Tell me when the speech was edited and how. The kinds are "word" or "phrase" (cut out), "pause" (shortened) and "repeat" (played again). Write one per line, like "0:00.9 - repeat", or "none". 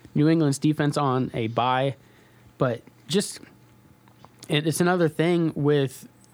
none

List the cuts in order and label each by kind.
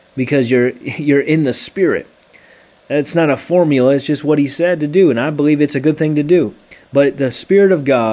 none

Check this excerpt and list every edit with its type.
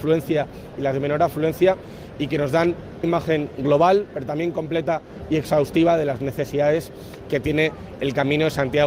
0:03.0 - word

